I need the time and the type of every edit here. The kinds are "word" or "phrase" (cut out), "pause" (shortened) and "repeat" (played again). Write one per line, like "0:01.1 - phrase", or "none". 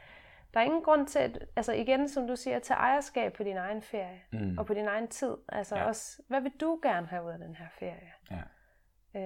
none